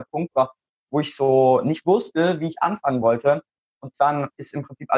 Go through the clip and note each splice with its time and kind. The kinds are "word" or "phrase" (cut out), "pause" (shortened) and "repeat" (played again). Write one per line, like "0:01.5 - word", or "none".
none